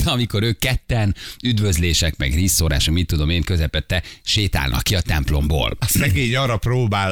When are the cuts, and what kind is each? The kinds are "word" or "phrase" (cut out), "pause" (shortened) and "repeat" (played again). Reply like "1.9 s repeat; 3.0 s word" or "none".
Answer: none

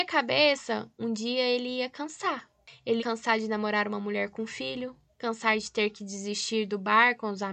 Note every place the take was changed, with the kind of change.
3.0 s word

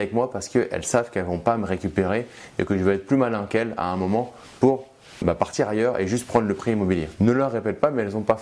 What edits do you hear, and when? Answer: 5.2 s word

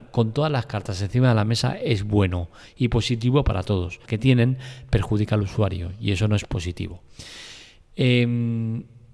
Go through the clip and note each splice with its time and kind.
4.1 s phrase

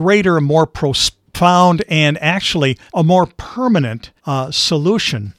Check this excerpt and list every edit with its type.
2.9 s pause; 4.2 s pause

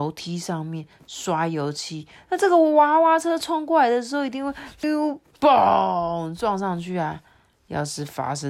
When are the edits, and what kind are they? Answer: 4.8 s word

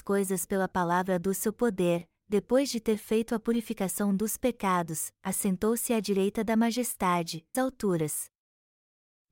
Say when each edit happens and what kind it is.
7.5 s word

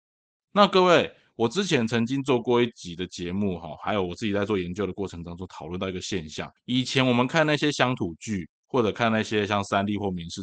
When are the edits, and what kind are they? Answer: 6.6 s pause

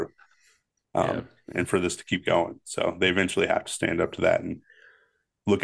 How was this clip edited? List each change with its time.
none

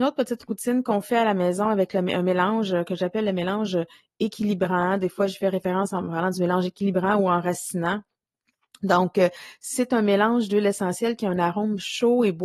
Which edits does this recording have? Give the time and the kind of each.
none

